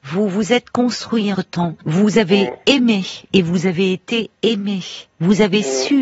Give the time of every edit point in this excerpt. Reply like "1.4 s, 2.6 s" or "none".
1.3 s, 1.8 s